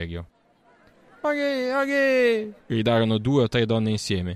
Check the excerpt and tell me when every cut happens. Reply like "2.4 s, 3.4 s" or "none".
2.6 s